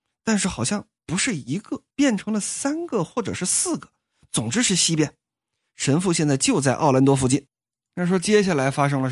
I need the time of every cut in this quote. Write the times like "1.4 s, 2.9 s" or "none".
1.0 s, 1.9 s